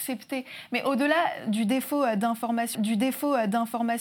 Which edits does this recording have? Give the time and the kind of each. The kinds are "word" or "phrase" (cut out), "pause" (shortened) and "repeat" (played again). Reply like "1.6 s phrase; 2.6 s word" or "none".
2.7 s repeat